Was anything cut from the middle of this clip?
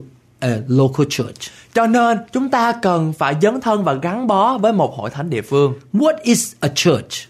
no; 0 cuts

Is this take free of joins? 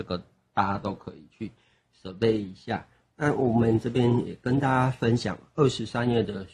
yes; 0 cuts

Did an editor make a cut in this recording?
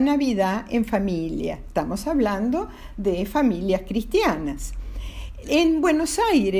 no; 0 cuts

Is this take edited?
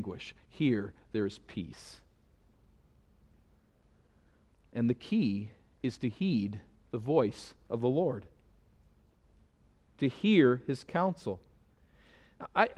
no; 0 cuts

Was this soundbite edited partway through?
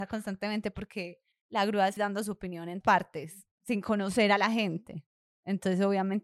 yes; 3 cuts; at 1.3 s, 2.0 s, 2.8 s

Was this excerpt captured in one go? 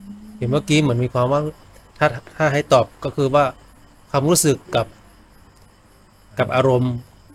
yes; 0 cuts

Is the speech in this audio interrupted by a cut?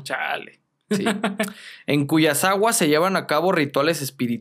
no; 0 cuts

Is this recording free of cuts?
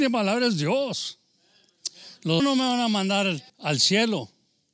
no; 2 cuts; at 2.4 s, 3.5 s

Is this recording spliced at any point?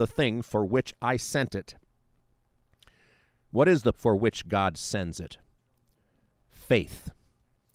yes; 1 cut; at 3.9 s

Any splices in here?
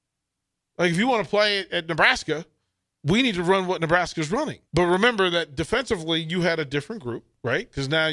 yes; 1 cut; at 4.7 s

